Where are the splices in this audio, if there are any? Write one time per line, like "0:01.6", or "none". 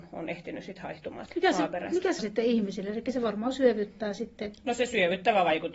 0:01.3
0:02.2